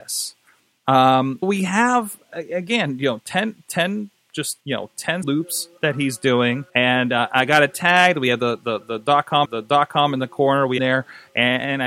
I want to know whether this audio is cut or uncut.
cut